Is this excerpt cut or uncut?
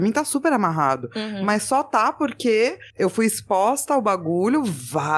cut